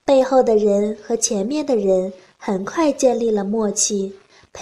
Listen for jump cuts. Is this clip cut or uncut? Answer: uncut